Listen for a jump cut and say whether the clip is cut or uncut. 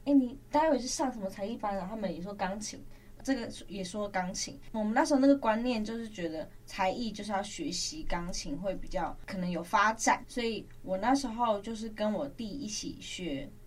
cut